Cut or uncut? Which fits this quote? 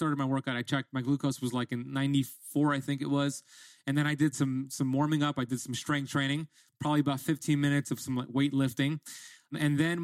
uncut